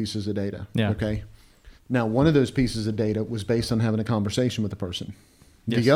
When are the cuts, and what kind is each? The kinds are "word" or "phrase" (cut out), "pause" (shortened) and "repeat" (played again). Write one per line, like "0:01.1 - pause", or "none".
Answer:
0:01.8 - pause